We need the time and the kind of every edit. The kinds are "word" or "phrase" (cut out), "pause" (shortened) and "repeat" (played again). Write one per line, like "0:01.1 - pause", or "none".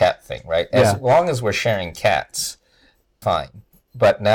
0:03.2 - word